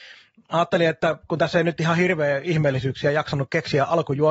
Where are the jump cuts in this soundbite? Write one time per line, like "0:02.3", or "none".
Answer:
none